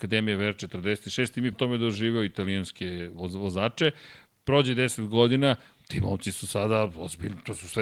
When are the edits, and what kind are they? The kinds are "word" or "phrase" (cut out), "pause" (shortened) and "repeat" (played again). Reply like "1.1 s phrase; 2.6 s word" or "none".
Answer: 1.5 s word